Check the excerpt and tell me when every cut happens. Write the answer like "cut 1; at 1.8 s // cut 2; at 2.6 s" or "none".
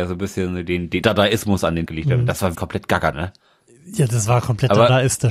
cut 1; at 1.0 s // cut 2; at 1.9 s // cut 3; at 2.5 s // cut 4; at 3.1 s